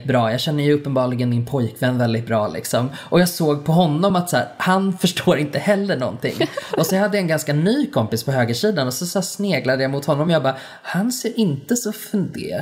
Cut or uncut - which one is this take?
uncut